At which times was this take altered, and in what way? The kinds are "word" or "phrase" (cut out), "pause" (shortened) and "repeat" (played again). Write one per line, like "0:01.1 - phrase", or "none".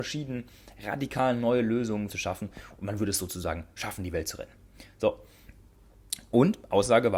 0:02.1 - phrase